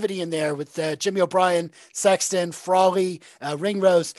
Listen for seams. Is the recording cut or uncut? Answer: uncut